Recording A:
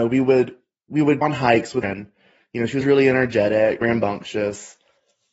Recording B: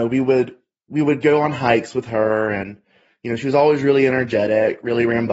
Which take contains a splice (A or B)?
A